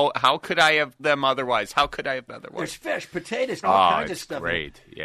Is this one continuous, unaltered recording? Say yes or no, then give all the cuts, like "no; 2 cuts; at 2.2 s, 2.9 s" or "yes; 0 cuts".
no; 3 cuts; at 1.0 s, 2.3 s, 3.6 s